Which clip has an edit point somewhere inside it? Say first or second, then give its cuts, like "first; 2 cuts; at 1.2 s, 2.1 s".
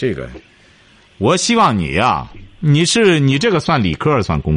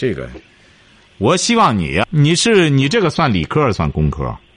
second; 1 cut; at 2.0 s